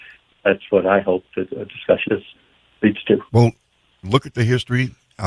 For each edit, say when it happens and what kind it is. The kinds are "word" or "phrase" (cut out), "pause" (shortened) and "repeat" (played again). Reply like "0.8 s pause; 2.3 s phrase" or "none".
2.1 s word; 3.3 s pause